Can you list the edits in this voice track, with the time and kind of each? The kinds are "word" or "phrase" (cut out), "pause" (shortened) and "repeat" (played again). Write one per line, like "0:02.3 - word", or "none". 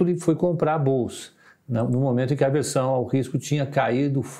none